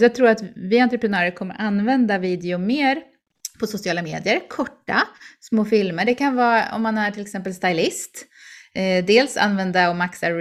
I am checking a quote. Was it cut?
no; 0 cuts

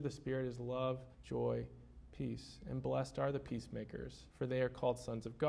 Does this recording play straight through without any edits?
no; 2 cuts; at 1.1 s, 4.3 s

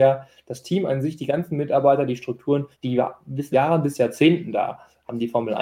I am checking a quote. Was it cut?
yes; 2 cuts; at 2.7 s, 3.5 s

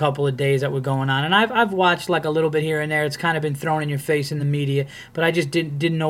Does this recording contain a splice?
no; 0 cuts

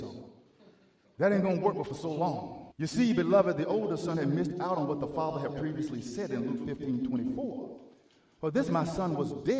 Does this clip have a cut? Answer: yes; 1 cut; at 2.7 s

